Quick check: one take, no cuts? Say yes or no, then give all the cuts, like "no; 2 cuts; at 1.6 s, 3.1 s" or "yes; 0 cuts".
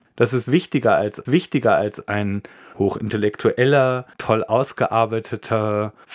no; 2 cuts; at 1.2 s, 4.1 s